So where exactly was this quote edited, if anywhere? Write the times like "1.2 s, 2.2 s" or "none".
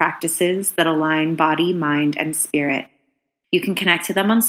none